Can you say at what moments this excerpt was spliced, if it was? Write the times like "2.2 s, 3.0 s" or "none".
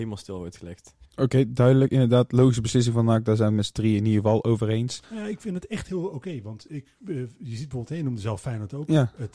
1.0 s, 5.0 s, 6.7 s